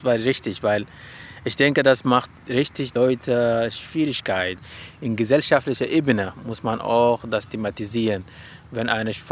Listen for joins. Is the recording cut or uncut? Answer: cut